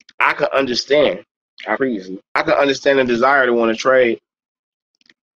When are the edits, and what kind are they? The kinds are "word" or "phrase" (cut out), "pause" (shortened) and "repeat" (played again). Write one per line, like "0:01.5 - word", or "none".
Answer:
0:01.8 - word
0:02.3 - pause